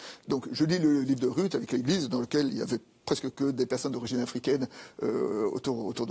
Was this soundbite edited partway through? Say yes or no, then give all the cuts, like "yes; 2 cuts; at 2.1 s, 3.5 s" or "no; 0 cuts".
no; 0 cuts